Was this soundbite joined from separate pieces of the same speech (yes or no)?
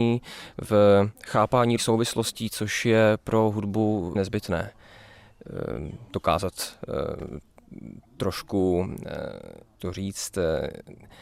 yes